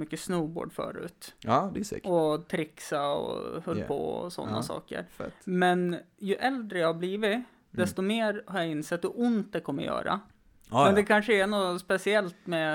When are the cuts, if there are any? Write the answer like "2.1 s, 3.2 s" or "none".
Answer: none